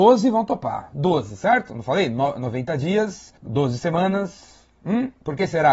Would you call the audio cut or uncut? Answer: cut